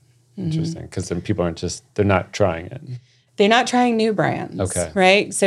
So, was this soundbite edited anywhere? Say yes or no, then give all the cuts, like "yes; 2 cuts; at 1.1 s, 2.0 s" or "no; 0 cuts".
no; 0 cuts